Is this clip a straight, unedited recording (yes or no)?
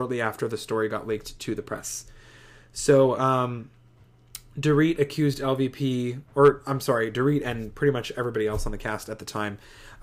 yes